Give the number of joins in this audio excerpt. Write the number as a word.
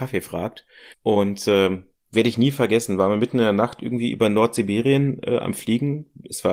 one